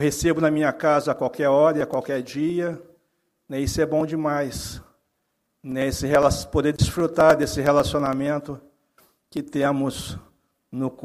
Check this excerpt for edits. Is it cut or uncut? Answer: uncut